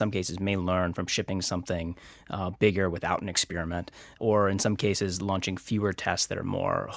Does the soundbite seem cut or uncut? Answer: uncut